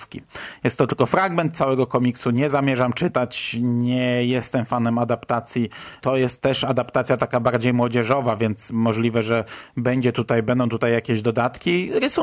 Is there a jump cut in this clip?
no; 0 cuts

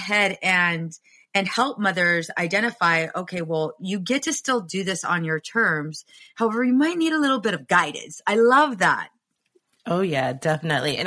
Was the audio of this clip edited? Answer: no; 0 cuts

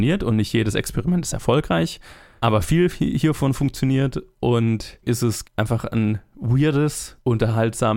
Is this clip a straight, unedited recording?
no; 2 cuts; at 5.0 s, 5.4 s

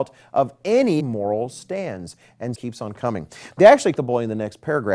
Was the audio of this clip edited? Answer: yes; 3 cuts; at 1.0 s, 2.5 s, 4.0 s

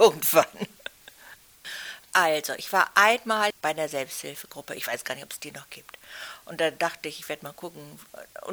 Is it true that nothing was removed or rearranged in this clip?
yes; 0 cuts

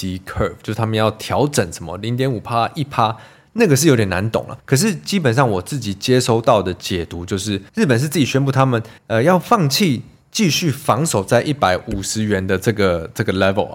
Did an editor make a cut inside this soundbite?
yes; 3 cuts; at 4.6 s, 7.7 s, 9.0 s

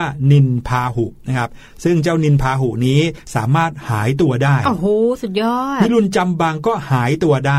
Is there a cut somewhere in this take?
yes; 1 cut; at 1.2 s

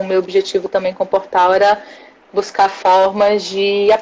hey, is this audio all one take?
yes; 0 cuts

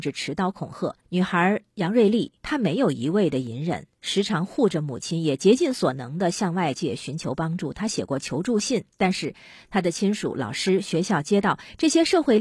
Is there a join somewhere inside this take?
yes; 4 cuts; at 1.0 s, 1.7 s, 2.4 s, 8.9 s

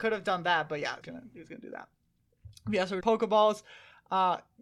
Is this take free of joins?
no; 2 cuts; at 1.0 s, 3.0 s

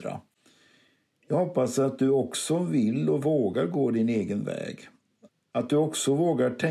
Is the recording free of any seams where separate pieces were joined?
no; 1 cut; at 5.3 s

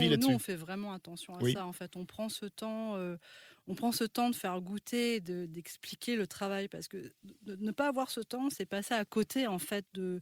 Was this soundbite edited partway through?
no; 0 cuts

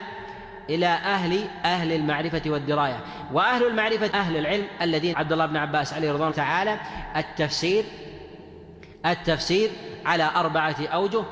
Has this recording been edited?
yes; 3 cuts; at 4.1 s, 5.1 s, 6.3 s

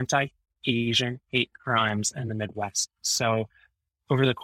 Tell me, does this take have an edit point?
no; 0 cuts

